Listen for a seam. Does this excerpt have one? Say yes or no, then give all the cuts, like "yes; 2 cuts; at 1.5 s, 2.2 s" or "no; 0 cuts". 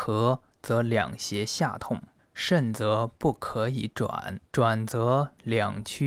yes; 2 cuts; at 2.2 s, 4.5 s